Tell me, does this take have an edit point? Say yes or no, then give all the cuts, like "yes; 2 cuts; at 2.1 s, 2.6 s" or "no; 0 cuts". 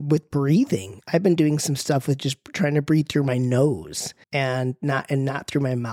yes; 1 cut; at 4.2 s